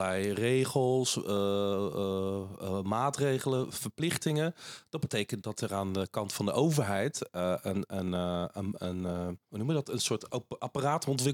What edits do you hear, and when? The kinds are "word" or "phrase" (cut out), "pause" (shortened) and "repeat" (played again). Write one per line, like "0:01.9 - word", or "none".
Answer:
0:09.4 - pause